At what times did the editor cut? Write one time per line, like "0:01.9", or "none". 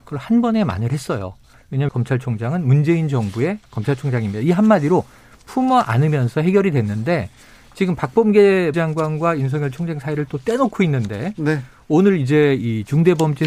0:01.9
0:08.7